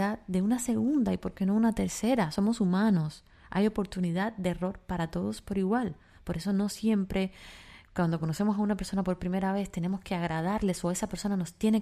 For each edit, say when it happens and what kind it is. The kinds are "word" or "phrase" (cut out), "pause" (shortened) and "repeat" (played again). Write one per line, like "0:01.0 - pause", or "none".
none